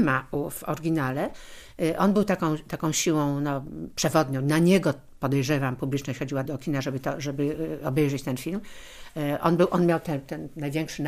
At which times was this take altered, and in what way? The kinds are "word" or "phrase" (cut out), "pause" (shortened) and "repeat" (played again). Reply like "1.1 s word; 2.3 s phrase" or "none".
6.4 s word